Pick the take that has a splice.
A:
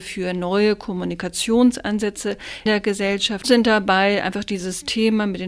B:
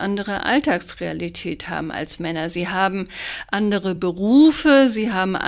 A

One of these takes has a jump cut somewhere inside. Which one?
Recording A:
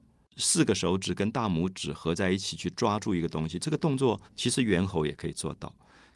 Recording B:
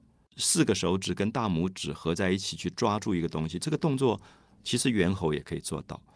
A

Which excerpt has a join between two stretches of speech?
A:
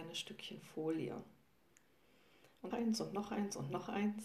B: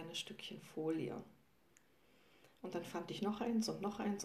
A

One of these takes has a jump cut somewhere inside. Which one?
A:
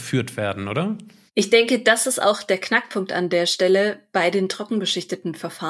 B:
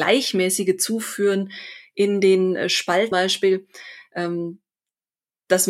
B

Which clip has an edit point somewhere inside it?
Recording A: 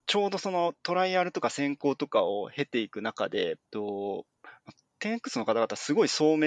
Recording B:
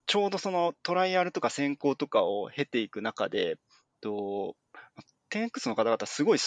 A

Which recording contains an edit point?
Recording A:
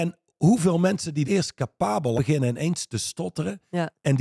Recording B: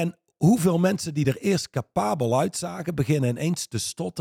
A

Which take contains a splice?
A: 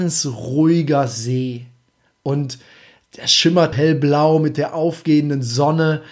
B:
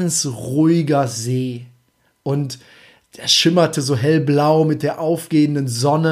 A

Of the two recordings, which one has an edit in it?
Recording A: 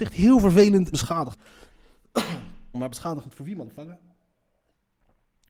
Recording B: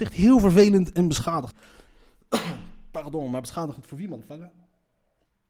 A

